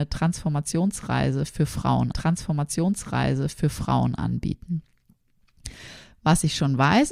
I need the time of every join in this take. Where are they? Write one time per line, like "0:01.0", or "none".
0:02.1